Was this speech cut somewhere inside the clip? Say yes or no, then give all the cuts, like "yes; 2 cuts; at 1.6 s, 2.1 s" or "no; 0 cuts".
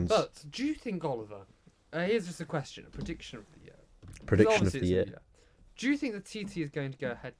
no; 0 cuts